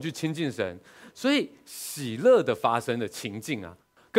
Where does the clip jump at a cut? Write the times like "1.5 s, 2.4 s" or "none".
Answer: none